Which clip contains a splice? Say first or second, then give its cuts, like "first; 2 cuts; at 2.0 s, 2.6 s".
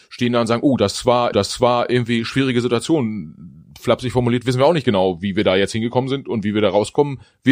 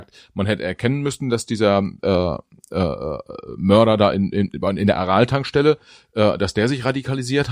first; 1 cut; at 1.3 s